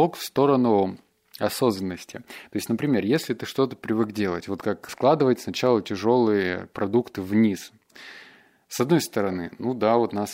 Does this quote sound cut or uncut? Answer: cut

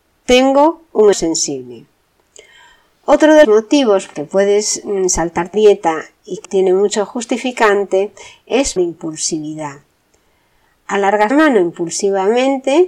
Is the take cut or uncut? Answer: cut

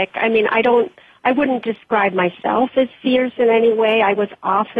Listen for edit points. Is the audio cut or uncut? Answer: uncut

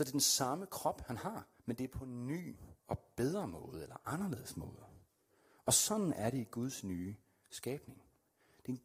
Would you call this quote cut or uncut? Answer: cut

